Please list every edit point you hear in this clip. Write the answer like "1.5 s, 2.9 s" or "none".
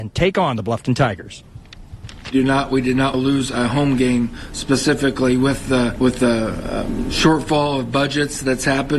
3.1 s, 6.0 s